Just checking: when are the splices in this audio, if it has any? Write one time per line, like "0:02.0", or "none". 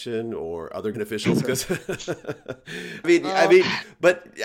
0:00.9
0:03.0